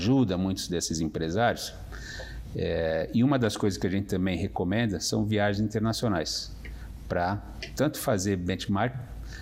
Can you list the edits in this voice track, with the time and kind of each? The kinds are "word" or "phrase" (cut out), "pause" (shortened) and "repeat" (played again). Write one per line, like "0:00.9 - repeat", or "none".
none